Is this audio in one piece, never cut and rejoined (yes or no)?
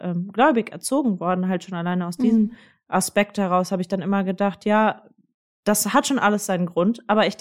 yes